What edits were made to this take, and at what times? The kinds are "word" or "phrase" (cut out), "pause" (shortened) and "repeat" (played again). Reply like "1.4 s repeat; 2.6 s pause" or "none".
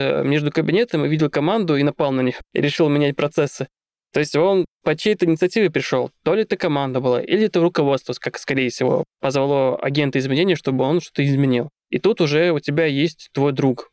none